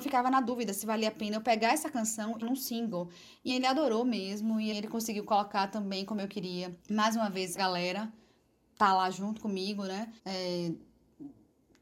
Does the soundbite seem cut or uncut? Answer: cut